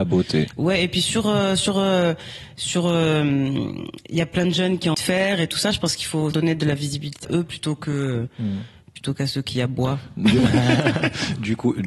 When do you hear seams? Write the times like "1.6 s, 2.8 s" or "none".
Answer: 4.9 s, 6.3 s, 7.2 s